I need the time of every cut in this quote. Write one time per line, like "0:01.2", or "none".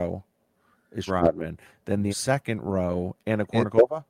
0:01.1
0:02.1
0:03.2